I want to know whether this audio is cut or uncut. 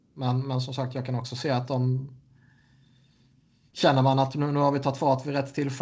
uncut